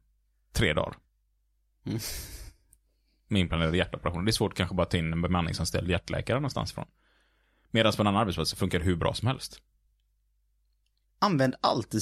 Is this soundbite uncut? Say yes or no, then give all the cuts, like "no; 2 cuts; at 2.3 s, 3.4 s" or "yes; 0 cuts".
yes; 0 cuts